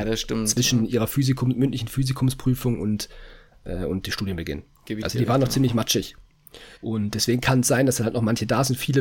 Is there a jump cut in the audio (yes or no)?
yes